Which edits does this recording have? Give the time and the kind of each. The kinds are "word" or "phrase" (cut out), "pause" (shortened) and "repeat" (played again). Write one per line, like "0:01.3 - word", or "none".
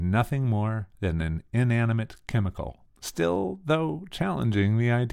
0:02.9 - pause